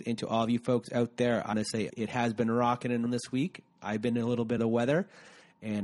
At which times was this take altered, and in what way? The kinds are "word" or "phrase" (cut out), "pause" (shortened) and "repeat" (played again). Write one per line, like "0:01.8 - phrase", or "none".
0:01.5 - word
0:01.9 - phrase
0:03.1 - word
0:04.6 - word